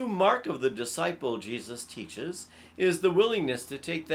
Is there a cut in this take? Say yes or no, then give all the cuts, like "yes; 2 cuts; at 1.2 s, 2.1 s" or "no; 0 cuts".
no; 0 cuts